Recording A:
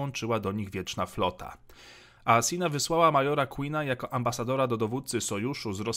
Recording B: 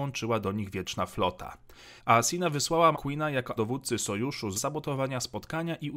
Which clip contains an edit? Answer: B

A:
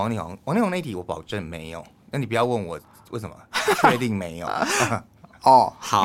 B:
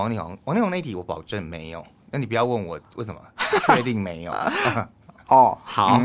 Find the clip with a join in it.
B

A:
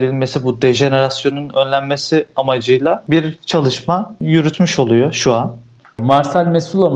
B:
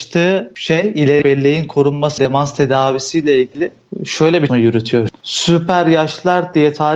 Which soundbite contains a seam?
B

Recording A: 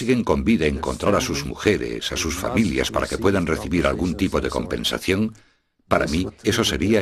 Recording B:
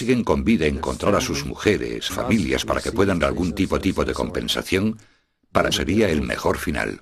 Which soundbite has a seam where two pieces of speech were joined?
B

